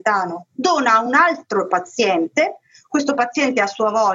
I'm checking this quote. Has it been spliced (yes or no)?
no